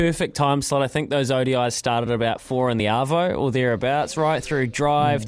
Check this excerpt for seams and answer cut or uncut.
uncut